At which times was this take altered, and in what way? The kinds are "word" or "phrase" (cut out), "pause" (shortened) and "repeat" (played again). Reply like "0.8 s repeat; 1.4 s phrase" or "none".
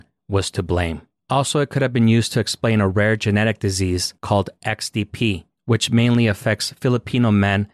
4.2 s pause